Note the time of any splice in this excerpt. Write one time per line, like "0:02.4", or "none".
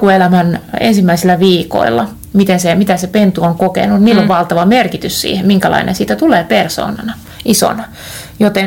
none

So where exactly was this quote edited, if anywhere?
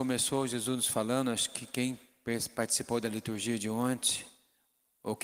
none

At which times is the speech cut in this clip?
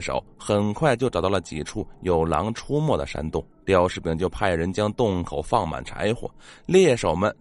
0:03.5

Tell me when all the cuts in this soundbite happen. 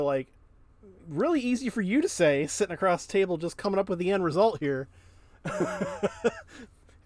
0:01.0

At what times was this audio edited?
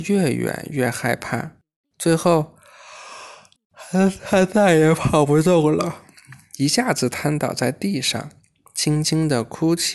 none

